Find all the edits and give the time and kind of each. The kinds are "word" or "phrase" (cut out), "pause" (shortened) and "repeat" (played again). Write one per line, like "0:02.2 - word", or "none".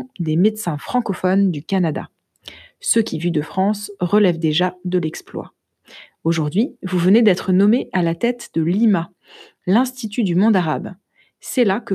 none